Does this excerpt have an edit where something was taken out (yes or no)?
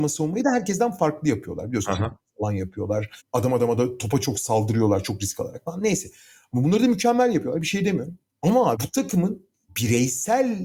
yes